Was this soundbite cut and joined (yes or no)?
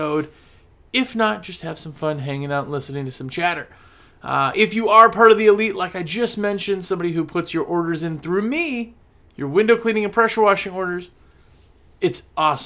no